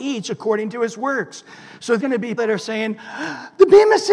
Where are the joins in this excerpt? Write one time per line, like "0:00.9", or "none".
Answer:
0:02.0
0:02.4